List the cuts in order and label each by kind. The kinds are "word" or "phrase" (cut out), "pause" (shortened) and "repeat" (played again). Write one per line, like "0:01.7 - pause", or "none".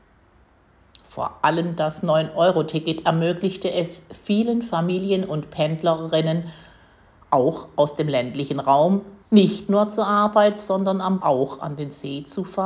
0:09.2 - pause
0:11.2 - word